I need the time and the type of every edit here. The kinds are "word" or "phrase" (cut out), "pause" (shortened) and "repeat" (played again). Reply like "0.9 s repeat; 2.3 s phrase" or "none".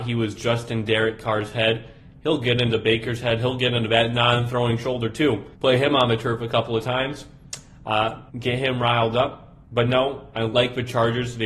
5.5 s pause; 8.3 s pause; 9.6 s pause